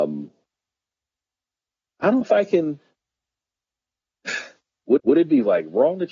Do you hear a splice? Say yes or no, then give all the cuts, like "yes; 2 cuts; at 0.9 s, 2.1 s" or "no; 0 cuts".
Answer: yes; 2 cuts; at 2.2 s, 5.0 s